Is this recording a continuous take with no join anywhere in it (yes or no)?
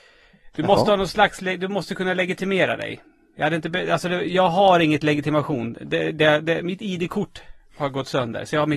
yes